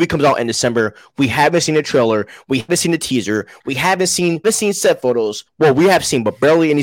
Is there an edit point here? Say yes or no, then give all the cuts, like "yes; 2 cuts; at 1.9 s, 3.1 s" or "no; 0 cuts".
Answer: yes; 3 cuts; at 2.7 s, 4.4 s, 5.5 s